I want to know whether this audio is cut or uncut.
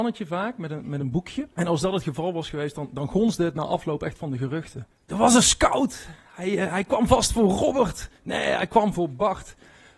cut